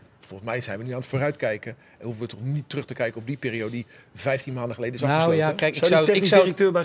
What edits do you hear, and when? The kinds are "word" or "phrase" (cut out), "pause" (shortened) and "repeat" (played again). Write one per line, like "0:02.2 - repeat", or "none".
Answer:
none